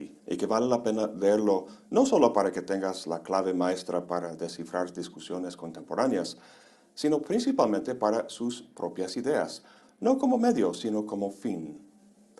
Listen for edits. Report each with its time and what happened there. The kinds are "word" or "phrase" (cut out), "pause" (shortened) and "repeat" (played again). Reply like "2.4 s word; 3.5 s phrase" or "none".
none